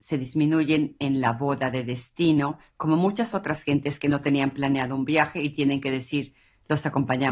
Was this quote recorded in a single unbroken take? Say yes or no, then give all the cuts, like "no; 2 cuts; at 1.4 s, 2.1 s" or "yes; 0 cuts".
yes; 0 cuts